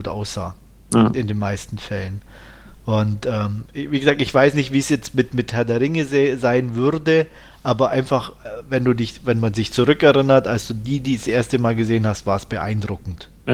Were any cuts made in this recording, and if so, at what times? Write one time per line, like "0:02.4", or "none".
none